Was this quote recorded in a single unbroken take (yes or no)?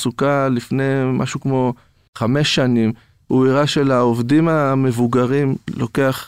yes